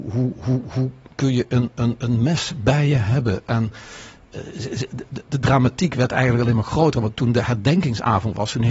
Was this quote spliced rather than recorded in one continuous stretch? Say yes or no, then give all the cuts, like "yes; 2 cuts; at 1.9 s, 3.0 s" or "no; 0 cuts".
no; 0 cuts